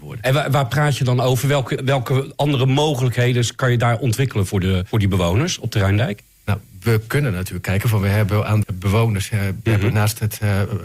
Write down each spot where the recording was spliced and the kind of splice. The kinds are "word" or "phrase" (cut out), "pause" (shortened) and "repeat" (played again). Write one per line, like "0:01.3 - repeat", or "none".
0:01.8 - word
0:04.9 - word
0:08.6 - word